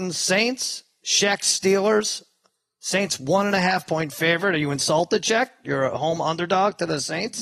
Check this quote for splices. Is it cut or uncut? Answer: uncut